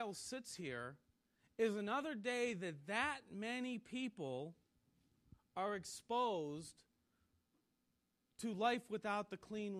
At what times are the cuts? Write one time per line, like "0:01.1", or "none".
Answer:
none